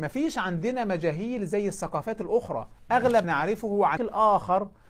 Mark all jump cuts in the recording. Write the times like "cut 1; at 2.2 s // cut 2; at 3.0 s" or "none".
cut 1; at 3.2 s // cut 2; at 4.0 s